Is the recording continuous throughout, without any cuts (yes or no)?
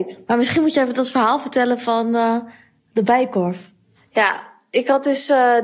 yes